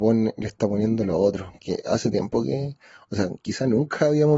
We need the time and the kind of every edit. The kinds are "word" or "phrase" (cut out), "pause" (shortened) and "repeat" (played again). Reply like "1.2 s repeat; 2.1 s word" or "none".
none

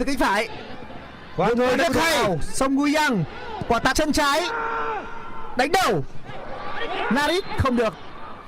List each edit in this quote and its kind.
3.9 s word

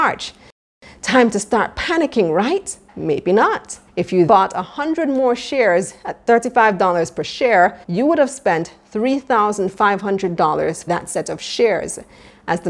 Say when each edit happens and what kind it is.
2.9 s pause; 3.9 s pause; 4.3 s word; 7.8 s pause; 10.9 s word

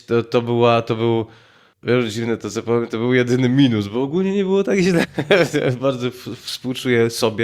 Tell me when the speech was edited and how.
none

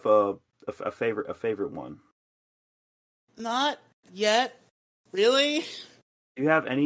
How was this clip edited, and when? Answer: none

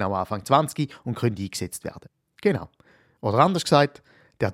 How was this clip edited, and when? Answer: none

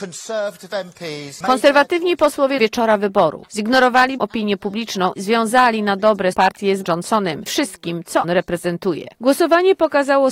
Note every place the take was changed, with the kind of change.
2.6 s phrase; 4.2 s word; 5.2 s word; 6.3 s word; 6.8 s word; 7.5 s word; 8.2 s word

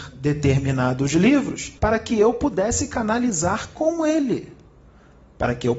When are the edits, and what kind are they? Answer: 1.8 s pause

